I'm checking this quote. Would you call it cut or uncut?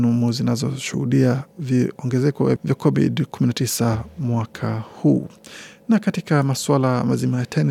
cut